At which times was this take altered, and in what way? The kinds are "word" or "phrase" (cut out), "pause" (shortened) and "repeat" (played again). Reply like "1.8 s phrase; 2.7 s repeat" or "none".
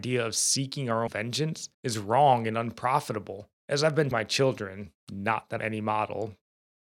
1.1 s word; 1.7 s pause; 3.6 s pause; 4.1 s word; 5.0 s pause; 5.6 s word